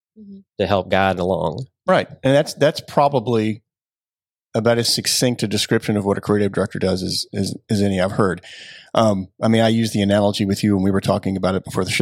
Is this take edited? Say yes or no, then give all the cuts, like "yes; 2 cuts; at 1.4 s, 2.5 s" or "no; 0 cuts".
no; 0 cuts